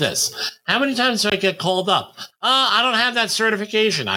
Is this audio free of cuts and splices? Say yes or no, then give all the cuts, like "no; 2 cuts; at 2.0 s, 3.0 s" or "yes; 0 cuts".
yes; 0 cuts